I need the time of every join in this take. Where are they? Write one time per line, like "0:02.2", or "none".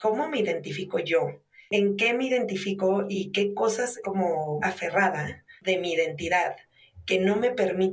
0:04.0
0:04.6